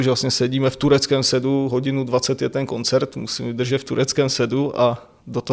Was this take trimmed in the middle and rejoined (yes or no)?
no